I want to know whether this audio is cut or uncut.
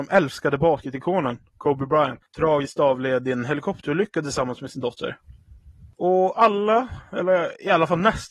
uncut